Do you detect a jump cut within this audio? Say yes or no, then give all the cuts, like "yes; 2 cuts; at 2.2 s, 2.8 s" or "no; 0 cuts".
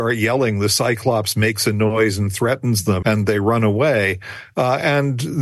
yes; 1 cut; at 3.0 s